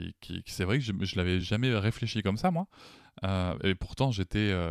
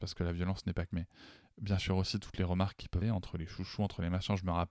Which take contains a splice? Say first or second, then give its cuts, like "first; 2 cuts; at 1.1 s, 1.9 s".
second; 2 cuts; at 0.9 s, 3.0 s